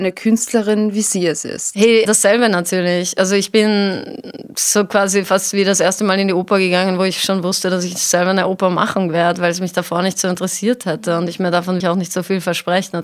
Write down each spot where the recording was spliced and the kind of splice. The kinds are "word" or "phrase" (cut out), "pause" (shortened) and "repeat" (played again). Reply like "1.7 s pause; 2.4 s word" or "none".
2.0 s word; 11.8 s word